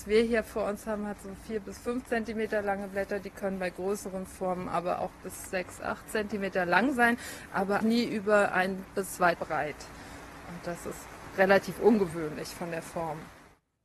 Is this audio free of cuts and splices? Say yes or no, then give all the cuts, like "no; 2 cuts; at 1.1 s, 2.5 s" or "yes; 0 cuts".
no; 2 cuts; at 7.8 s, 9.4 s